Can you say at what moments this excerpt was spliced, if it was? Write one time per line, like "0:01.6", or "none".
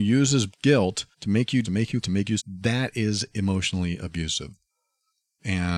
0:01.1
0:01.6
0:02.0
0:02.4

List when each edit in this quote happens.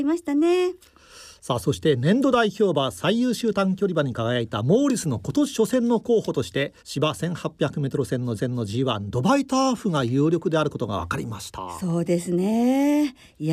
0:06.8
0:08.4

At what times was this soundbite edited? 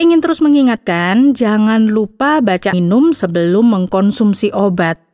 0:02.7

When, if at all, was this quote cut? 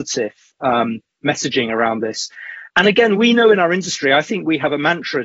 none

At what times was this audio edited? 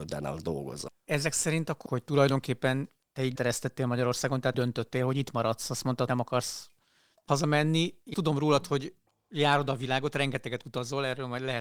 0:01.9
0:03.4
0:04.5
0:06.1
0:07.3
0:08.1

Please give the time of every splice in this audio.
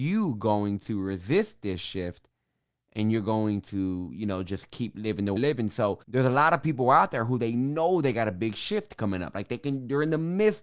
0:05.4
0:06.0

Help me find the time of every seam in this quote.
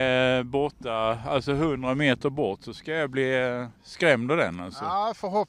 none

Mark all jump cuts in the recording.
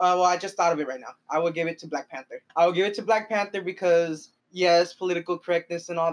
0:02.5
0:04.4

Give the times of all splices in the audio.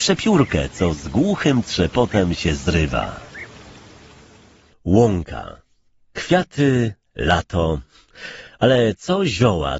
none

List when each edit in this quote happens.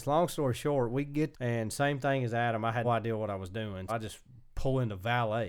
0:01.3
0:02.8
0:03.9

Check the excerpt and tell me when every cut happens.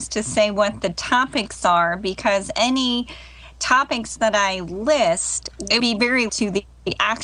0:05.8
0:06.3

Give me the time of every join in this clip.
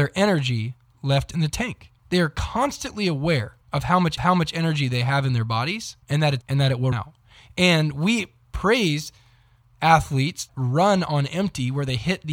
0:02.0
0:03.6
0:04.2
0:06.0
0:06.4
0:06.9
0:10.5

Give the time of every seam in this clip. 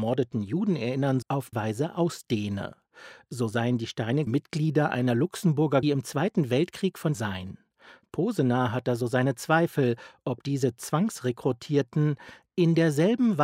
0:01.2
0:01.5
0:04.3
0:05.8
0:07.1

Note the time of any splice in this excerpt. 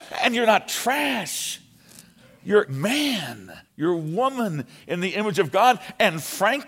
0:02.6
0:03.6

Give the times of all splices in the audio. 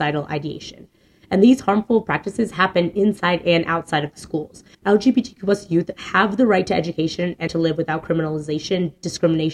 0:04.7
0:07.5

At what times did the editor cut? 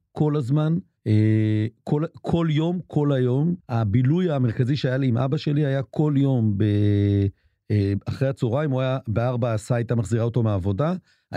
0:01.0
0:03.6

